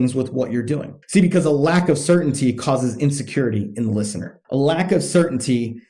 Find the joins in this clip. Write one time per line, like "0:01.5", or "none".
0:01.0
0:04.4